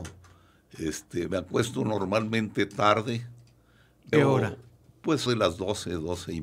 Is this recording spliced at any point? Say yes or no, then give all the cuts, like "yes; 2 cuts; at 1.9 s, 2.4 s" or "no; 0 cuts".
yes; 3 cuts; at 1.3 s, 4.1 s, 5.3 s